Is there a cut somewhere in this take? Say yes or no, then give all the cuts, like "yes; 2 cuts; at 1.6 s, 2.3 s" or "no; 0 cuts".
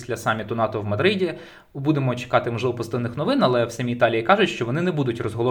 no; 0 cuts